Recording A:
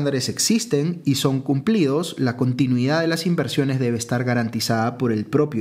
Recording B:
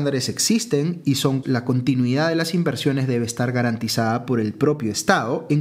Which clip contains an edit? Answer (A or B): B